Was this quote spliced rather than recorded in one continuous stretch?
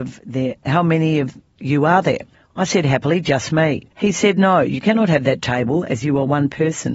yes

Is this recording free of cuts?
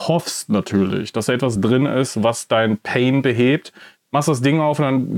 yes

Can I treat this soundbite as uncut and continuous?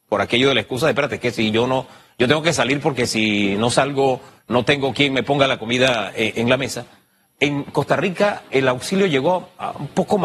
yes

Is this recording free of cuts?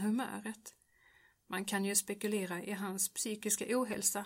yes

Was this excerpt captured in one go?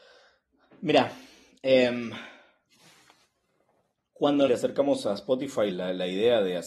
no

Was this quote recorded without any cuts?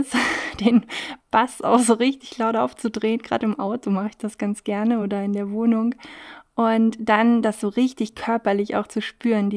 yes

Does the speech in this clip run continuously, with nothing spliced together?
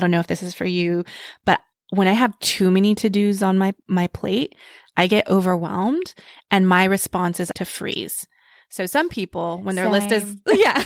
no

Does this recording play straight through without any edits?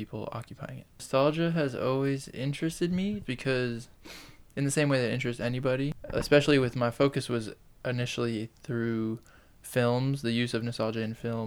no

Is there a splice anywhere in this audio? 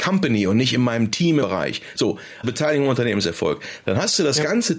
yes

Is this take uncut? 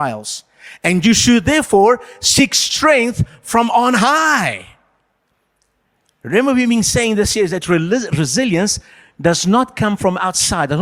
yes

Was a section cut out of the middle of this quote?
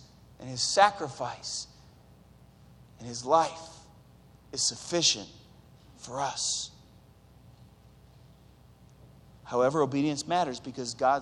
no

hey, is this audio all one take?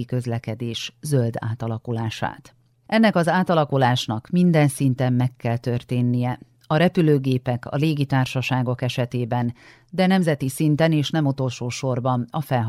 yes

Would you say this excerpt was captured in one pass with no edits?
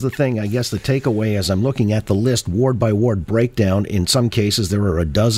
yes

